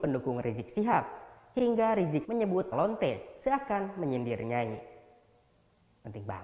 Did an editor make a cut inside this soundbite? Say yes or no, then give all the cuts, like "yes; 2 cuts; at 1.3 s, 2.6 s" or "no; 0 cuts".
yes; 2 cuts; at 2.2 s, 2.7 s